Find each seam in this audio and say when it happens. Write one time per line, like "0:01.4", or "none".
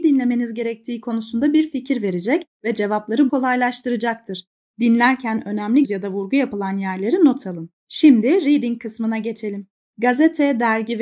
0:03.3
0:05.8
0:07.8